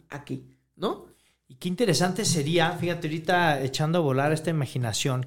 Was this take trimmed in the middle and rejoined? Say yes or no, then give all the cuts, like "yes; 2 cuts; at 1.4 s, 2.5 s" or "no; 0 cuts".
no; 0 cuts